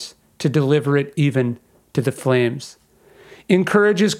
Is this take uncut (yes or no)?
yes